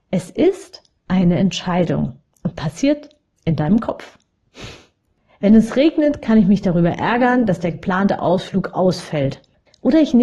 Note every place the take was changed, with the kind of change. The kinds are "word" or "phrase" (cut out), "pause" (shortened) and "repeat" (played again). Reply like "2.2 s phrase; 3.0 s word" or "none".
none